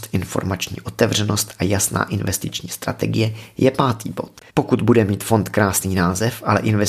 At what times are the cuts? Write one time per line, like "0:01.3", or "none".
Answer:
0:04.5